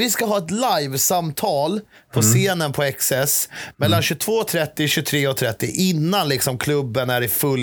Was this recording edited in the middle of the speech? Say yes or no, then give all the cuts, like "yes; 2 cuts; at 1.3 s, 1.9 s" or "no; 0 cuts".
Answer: no; 0 cuts